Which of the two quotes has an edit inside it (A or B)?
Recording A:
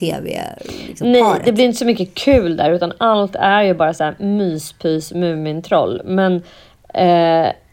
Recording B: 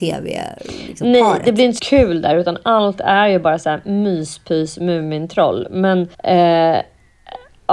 B